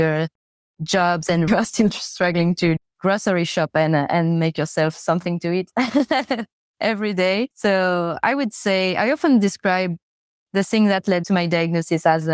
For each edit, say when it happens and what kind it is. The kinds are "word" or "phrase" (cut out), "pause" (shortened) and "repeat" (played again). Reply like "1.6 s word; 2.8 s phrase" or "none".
1.5 s phrase; 2.8 s word; 7.5 s pause

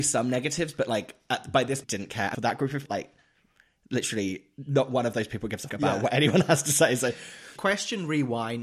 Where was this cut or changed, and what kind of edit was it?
1.8 s phrase; 2.3 s word; 2.9 s word; 5.7 s word; 7.6 s word

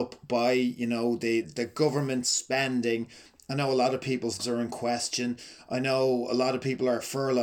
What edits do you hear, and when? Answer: 1.4 s word; 4.4 s word

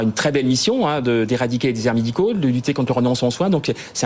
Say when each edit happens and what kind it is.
none

